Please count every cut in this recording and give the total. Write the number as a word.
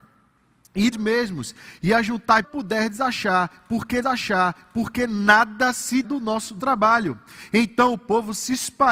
five